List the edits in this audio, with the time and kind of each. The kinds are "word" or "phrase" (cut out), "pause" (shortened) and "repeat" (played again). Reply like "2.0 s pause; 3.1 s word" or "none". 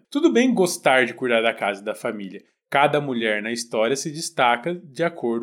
none